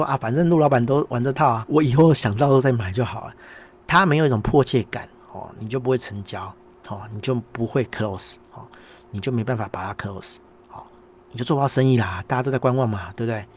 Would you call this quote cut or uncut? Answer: cut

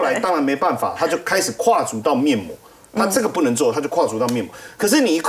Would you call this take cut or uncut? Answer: uncut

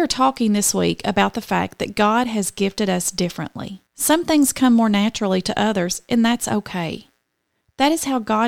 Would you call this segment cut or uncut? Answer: cut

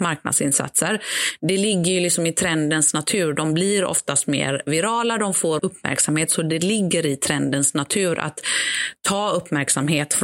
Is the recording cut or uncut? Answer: cut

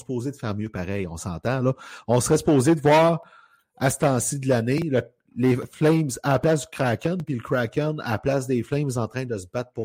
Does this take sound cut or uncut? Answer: uncut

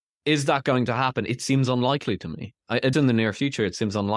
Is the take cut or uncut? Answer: cut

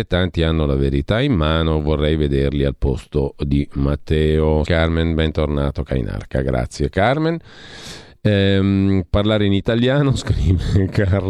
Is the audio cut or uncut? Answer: cut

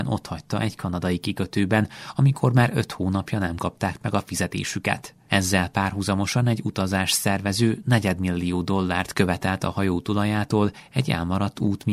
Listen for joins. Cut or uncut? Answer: uncut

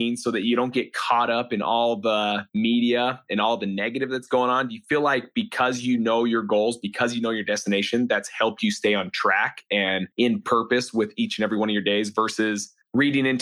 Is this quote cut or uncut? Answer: cut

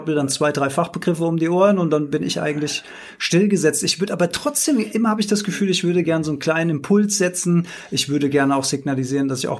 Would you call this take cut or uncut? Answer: uncut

